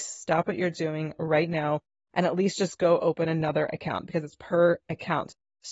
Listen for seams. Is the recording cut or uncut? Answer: uncut